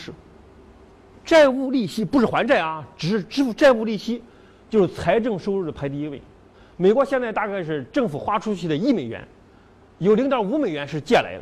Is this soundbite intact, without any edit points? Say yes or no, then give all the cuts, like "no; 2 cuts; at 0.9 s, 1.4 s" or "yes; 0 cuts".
yes; 0 cuts